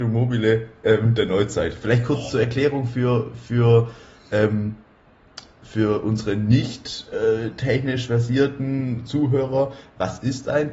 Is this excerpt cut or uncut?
uncut